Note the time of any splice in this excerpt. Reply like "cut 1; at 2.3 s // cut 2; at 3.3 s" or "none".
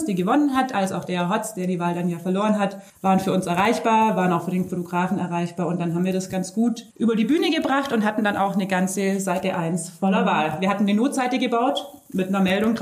cut 1; at 2.9 s // cut 2; at 6.9 s